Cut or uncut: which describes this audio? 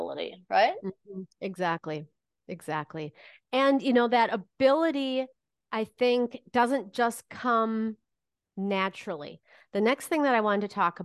uncut